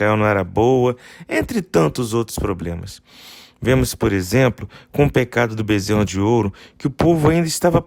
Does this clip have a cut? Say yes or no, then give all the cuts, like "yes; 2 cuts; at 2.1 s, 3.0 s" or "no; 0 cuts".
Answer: no; 0 cuts